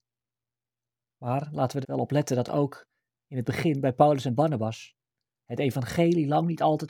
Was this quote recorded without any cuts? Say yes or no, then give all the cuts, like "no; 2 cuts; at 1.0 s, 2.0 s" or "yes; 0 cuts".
no; 1 cut; at 1.8 s